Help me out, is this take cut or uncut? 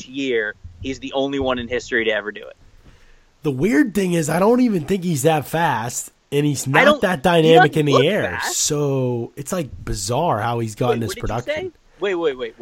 uncut